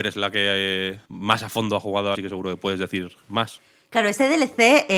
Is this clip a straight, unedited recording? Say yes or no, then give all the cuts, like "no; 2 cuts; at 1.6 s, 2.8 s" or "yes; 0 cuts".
no; 2 cuts; at 1.0 s, 2.1 s